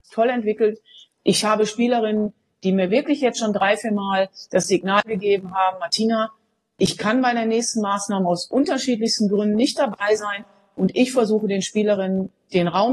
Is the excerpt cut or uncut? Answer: uncut